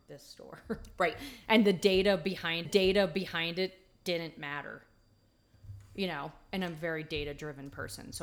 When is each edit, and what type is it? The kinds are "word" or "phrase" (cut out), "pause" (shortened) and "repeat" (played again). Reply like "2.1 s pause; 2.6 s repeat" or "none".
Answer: 2.6 s repeat